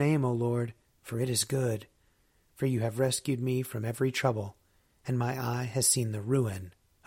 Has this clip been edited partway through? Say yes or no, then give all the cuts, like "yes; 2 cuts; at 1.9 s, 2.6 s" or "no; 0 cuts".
no; 0 cuts